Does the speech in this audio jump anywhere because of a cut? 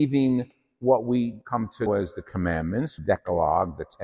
yes; 3 cuts; at 1.4 s, 1.9 s, 3.0 s

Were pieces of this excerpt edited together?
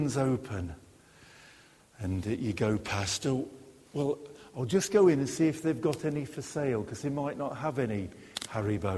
no; 0 cuts

